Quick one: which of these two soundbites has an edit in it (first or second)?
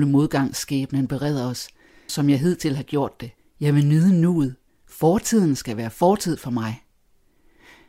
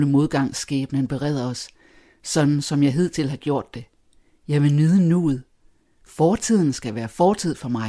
first